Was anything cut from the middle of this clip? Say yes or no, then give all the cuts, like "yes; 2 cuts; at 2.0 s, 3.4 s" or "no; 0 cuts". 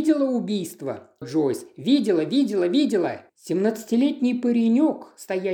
yes; 2 cuts; at 1.2 s, 3.3 s